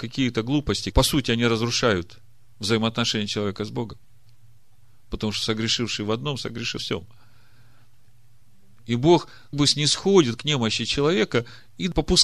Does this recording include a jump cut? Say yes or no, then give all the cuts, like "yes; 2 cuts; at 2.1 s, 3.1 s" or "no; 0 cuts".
yes; 3 cuts; at 0.9 s, 6.8 s, 9.5 s